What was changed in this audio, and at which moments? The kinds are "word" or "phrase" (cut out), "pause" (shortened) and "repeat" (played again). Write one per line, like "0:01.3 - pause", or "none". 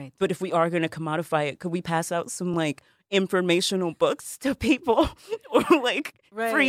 none